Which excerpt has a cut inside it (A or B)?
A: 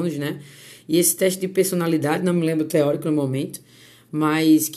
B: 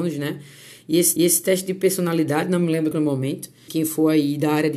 B